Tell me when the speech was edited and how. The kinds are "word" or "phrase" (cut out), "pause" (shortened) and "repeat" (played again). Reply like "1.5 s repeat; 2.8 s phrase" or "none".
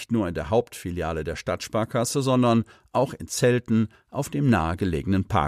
none